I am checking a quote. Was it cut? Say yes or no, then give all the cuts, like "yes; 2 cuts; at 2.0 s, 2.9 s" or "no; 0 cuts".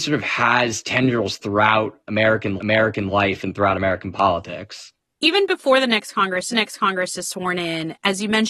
yes; 2 cuts; at 2.6 s, 6.5 s